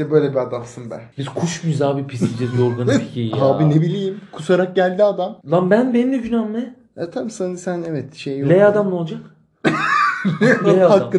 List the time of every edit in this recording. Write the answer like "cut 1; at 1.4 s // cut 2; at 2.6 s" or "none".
cut 1; at 1.1 s // cut 2; at 5.4 s